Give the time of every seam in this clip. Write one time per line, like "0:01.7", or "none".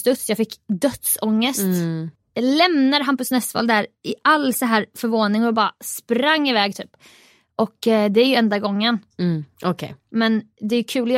0:02.2
0:10.0